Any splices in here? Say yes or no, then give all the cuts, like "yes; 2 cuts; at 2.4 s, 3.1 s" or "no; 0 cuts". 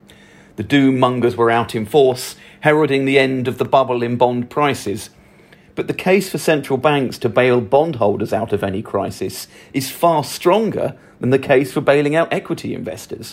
no; 0 cuts